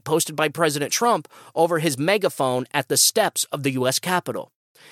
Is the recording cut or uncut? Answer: uncut